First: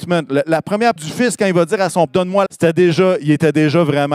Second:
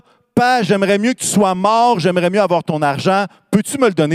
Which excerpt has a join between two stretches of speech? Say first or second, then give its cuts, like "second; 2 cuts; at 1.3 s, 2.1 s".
first; 3 cuts; at 1.0 s, 2.1 s, 2.5 s